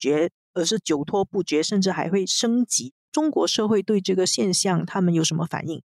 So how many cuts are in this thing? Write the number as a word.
one